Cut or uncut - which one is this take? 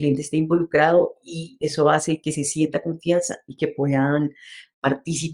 uncut